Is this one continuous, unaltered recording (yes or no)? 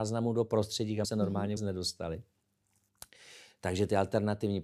no